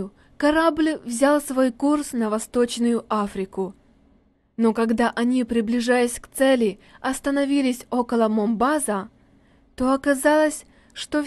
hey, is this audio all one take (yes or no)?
yes